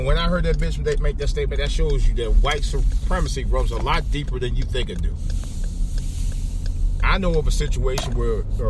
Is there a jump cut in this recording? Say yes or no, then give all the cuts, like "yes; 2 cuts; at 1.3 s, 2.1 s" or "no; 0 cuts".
no; 0 cuts